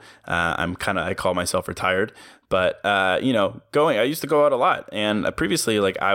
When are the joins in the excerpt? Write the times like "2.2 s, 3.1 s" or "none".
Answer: none